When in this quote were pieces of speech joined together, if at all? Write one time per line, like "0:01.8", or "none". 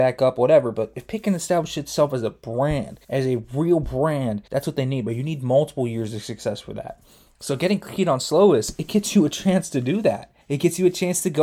0:03.0
0:04.5
0:10.4